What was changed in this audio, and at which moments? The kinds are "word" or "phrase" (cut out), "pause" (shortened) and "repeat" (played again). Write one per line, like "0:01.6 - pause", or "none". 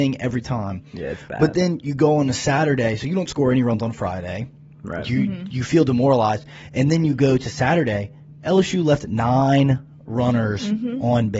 none